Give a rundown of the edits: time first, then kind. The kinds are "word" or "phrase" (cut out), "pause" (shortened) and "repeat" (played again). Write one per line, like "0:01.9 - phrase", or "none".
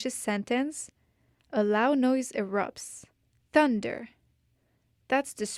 none